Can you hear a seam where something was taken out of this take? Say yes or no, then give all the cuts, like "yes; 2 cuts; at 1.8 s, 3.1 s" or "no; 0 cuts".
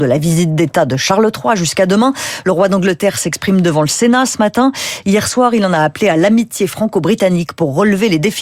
no; 0 cuts